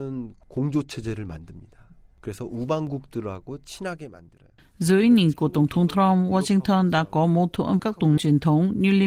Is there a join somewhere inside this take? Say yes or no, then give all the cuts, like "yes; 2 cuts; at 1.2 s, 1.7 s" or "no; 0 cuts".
yes; 3 cuts; at 5.3 s, 7.8 s, 8.2 s